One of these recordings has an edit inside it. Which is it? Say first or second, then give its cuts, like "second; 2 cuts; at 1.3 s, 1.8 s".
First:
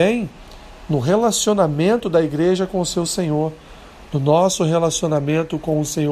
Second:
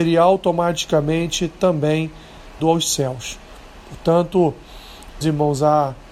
second; 2 cuts; at 2.6 s, 5.2 s